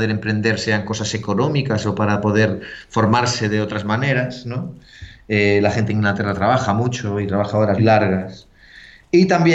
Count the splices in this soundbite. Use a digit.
1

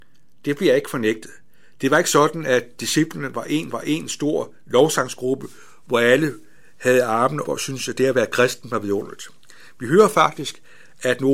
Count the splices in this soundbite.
2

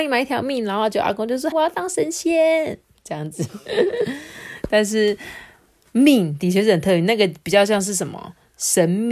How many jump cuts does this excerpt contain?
1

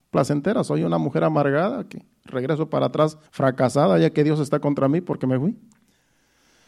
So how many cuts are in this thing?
1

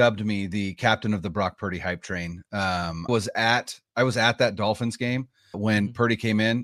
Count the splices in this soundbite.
2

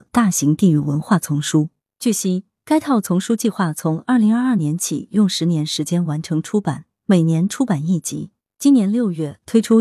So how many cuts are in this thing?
0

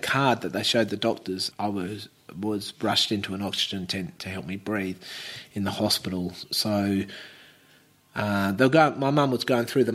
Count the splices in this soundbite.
1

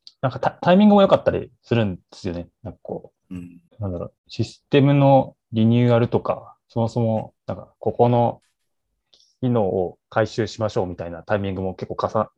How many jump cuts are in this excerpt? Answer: 6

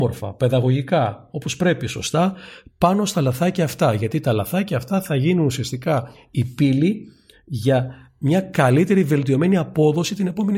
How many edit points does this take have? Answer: 0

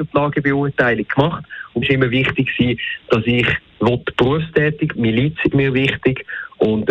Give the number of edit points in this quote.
3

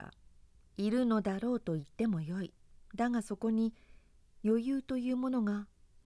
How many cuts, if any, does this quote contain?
1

